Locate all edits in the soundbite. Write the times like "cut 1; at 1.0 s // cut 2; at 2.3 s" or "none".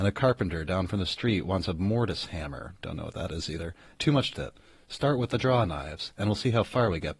cut 1; at 3.9 s // cut 2; at 4.3 s